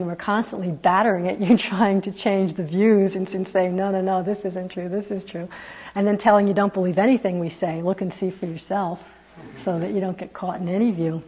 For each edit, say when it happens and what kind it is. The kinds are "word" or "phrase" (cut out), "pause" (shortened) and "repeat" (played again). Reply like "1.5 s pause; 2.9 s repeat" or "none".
3.3 s repeat